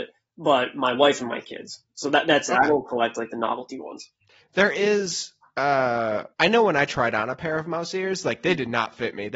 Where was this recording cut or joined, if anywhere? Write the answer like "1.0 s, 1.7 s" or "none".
4.2 s, 6.3 s